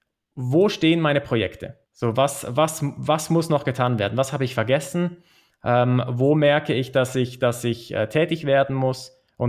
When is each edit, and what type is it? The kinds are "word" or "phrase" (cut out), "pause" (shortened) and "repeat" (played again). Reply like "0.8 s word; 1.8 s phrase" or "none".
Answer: 1.8 s pause